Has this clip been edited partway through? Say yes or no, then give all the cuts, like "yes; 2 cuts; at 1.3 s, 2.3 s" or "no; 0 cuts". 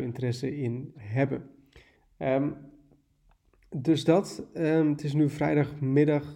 yes; 1 cut; at 0.9 s